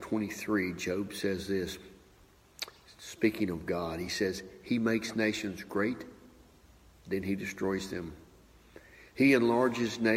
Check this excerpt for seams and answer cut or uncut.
uncut